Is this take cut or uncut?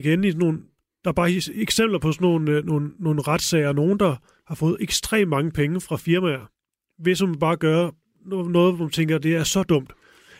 uncut